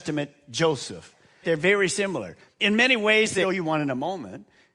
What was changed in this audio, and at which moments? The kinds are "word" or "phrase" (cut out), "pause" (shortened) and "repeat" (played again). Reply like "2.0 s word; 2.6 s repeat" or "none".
1.4 s word; 3.4 s phrase